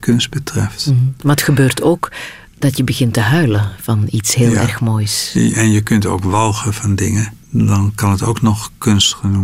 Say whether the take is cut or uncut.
cut